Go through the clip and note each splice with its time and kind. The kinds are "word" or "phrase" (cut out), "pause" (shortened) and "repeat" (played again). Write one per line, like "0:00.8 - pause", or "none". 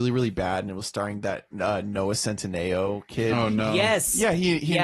none